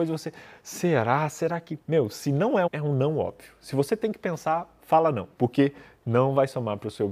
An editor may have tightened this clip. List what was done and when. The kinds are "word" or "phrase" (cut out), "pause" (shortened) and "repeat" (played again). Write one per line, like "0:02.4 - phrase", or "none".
0:01.8 - pause
0:02.7 - phrase
0:05.3 - pause